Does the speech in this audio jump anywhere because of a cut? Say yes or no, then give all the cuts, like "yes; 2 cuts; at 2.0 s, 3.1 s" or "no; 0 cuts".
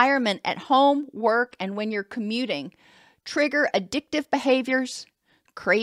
no; 0 cuts